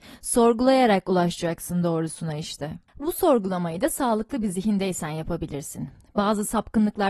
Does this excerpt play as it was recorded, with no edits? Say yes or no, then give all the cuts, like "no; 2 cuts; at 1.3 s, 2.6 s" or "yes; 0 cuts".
yes; 0 cuts